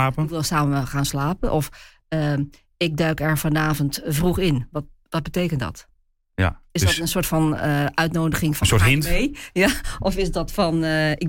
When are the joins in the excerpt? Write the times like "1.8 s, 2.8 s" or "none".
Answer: none